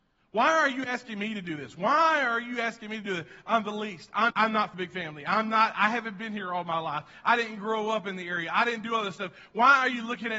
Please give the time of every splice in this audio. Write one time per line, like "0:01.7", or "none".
0:04.3
0:04.7